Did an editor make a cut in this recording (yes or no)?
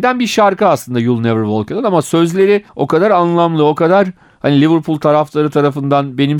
yes